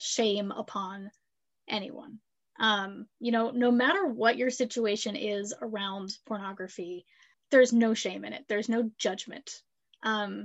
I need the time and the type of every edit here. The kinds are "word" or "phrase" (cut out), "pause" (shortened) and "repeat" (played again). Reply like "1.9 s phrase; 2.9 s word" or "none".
7.3 s word